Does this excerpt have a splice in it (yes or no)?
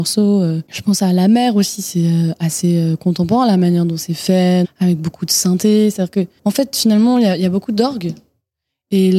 yes